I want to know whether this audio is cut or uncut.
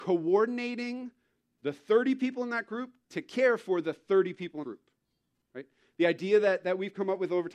cut